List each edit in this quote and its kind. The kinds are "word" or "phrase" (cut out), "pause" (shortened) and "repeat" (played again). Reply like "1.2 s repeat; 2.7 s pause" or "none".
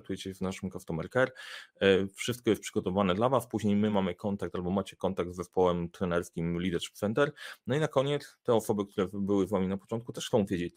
none